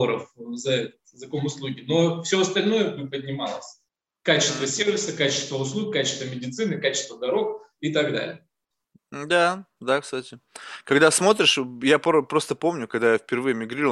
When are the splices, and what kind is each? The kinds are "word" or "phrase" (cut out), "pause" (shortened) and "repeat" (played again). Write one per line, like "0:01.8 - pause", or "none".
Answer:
none